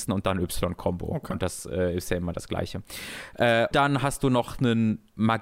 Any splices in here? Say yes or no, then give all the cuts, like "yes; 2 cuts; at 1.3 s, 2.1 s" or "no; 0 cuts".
yes; 1 cut; at 3.7 s